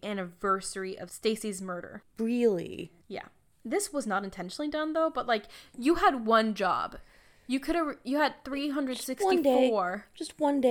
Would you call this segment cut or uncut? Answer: uncut